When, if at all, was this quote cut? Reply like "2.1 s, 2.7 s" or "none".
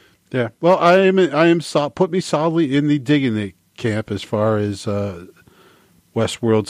none